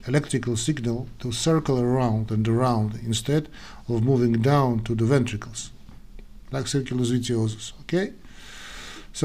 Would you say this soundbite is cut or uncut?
uncut